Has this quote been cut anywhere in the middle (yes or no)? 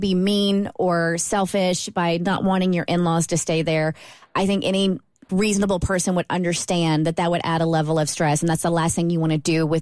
yes